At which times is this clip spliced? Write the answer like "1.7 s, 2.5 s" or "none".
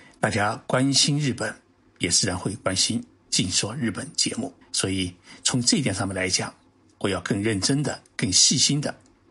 4.6 s, 8.0 s